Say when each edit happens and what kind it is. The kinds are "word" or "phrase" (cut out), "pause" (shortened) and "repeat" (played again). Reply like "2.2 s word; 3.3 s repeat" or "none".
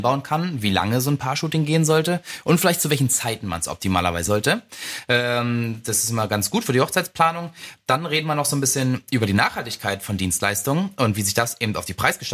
4.3 s word